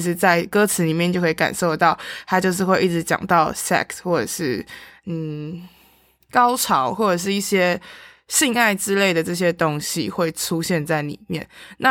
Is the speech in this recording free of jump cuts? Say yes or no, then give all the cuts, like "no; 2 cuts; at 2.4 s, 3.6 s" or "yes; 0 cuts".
yes; 0 cuts